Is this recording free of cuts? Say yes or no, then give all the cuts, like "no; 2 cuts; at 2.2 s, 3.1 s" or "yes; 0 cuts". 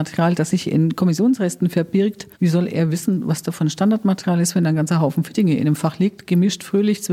no; 1 cut; at 2.3 s